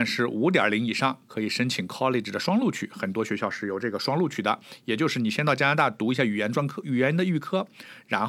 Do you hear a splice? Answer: no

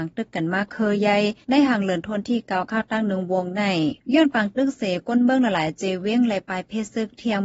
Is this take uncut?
no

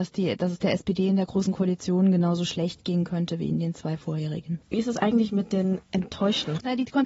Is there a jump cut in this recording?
no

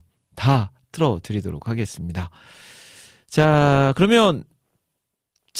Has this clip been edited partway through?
no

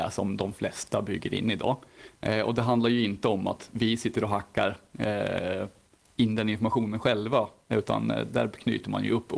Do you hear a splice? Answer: no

